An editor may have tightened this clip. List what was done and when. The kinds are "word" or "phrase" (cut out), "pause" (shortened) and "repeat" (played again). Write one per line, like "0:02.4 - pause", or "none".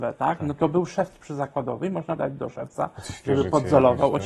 0:02.2 - word